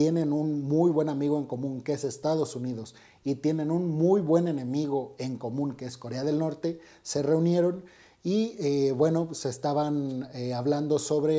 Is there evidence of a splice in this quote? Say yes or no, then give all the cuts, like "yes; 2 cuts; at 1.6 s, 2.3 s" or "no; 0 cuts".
no; 0 cuts